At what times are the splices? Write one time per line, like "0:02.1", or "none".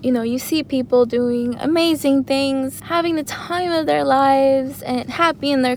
none